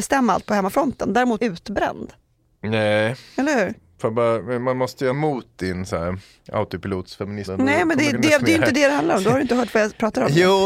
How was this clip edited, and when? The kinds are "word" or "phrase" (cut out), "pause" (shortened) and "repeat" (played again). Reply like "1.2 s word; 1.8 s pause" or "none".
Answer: 1.4 s word; 5.1 s phrase; 7.5 s word; 8.1 s word